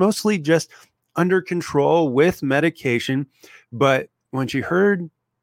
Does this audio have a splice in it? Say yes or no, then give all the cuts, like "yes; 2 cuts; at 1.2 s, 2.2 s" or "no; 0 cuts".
no; 0 cuts